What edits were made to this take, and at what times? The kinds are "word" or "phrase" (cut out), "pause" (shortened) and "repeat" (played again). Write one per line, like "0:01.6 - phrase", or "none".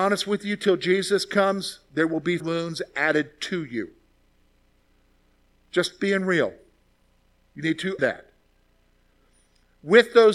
0:02.4 - word
0:08.0 - word